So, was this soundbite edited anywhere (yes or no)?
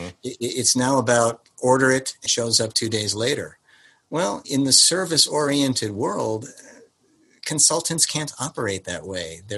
yes